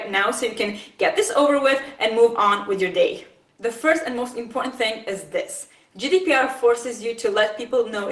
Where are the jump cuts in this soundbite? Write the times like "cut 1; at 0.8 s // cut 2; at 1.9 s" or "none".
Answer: none